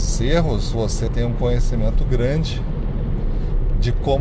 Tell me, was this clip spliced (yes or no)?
yes